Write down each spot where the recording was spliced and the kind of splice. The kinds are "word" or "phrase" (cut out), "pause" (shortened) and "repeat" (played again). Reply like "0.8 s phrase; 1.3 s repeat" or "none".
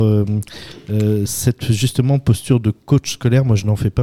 none